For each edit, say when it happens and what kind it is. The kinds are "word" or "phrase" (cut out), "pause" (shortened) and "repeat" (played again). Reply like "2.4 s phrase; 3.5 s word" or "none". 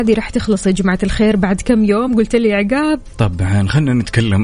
none